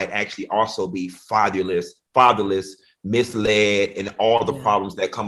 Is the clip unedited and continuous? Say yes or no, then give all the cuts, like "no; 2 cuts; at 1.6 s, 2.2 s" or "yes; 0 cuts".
yes; 0 cuts